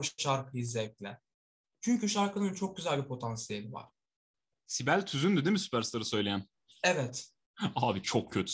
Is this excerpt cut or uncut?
uncut